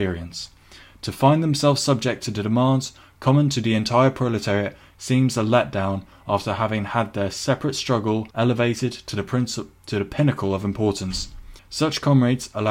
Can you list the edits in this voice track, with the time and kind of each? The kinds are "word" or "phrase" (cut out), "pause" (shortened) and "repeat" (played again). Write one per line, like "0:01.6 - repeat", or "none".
0:08.3 - pause
0:11.6 - pause